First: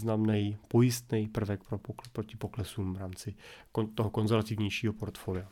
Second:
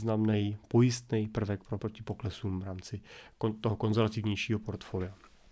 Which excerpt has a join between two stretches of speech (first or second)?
second